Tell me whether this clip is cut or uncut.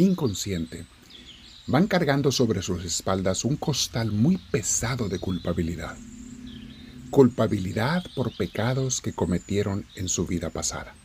uncut